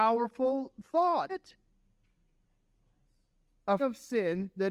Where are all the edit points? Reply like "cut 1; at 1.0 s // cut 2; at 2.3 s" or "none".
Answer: cut 1; at 1.3 s // cut 2; at 3.8 s